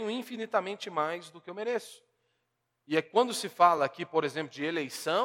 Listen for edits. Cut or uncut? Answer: uncut